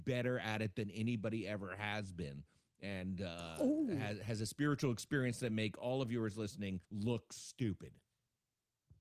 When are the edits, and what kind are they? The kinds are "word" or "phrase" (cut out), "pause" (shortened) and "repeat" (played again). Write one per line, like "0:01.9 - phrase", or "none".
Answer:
0:06.8 - pause